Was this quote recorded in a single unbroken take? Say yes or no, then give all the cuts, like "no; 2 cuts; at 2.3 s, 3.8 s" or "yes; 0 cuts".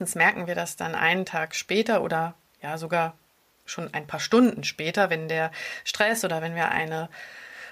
yes; 0 cuts